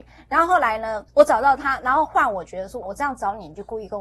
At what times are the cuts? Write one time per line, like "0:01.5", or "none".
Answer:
0:01.1
0:02.8